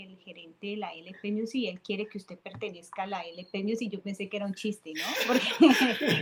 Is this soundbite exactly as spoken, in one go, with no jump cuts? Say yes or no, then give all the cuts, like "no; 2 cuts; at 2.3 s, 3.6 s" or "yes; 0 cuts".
yes; 0 cuts